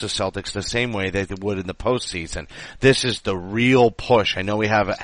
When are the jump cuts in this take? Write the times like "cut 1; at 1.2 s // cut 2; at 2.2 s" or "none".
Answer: none